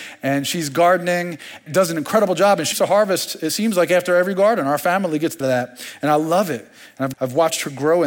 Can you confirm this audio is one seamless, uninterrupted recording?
no; 4 cuts; at 1.7 s, 2.7 s, 5.4 s, 7.1 s

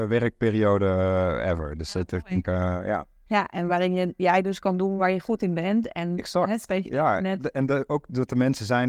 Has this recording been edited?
no; 0 cuts

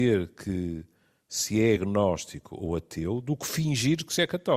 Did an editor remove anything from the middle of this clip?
no; 0 cuts

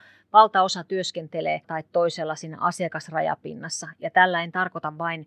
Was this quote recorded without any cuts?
no; 1 cut; at 1.6 s

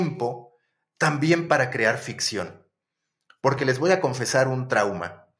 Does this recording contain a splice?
no; 0 cuts

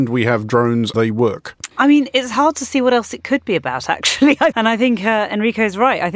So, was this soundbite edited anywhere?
yes; 3 cuts; at 0.9 s, 1.7 s, 4.5 s

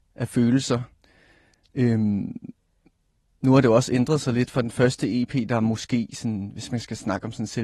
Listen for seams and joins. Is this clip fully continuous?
yes; 0 cuts

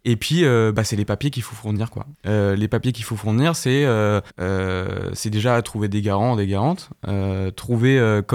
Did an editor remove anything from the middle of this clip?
yes; 2 cuts; at 2.1 s, 4.3 s

